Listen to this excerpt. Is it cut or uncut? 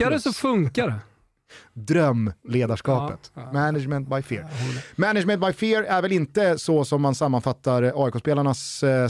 uncut